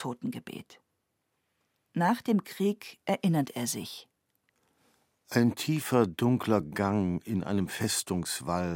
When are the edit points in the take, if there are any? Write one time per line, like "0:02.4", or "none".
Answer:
none